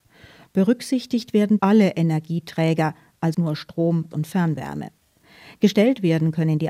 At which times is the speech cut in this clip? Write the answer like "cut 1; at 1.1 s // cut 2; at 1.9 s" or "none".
cut 1; at 1.6 s // cut 2; at 3.3 s // cut 3; at 4.1 s